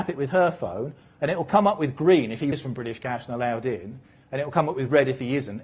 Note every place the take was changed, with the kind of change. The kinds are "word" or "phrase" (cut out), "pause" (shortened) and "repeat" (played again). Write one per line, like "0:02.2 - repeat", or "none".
0:02.5 - word